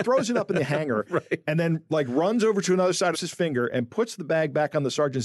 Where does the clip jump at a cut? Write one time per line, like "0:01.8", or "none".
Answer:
0:03.1